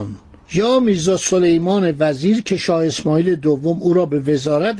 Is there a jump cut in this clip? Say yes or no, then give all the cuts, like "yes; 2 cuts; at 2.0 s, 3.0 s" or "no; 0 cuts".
no; 0 cuts